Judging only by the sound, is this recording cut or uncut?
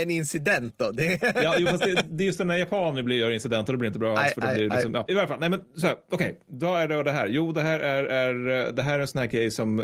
uncut